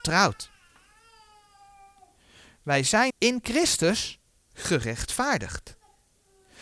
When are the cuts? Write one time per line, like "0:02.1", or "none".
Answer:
0:03.1

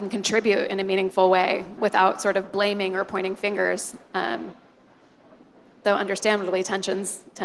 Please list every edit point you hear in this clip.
0:01.8

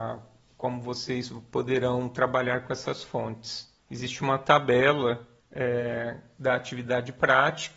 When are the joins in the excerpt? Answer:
0:03.8
0:05.4

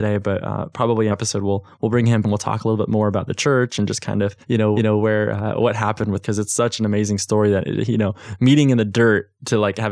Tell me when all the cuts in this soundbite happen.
0:01.1
0:02.2
0:04.4
0:04.8
0:06.2

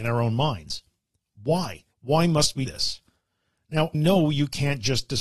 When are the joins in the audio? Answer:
0:01.9
0:02.7
0:03.9

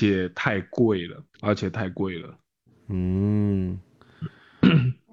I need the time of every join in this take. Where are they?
0:01.3

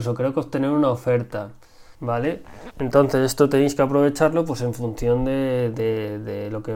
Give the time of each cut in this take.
0:01.9

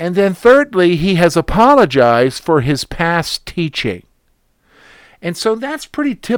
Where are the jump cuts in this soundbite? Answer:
none

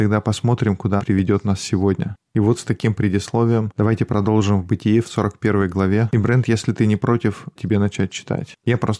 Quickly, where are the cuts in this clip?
0:01.0
0:07.6

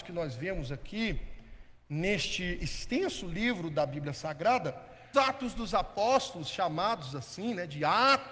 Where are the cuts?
0:05.1

